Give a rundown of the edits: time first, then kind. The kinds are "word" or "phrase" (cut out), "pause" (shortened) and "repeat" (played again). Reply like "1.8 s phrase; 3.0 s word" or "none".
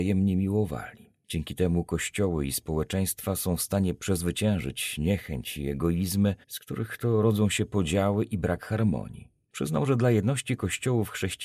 6.4 s pause